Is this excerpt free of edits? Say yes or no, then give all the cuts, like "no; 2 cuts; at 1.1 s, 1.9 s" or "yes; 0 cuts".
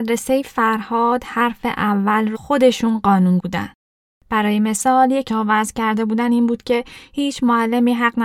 no; 3 cuts; at 2.3 s, 3.4 s, 5.3 s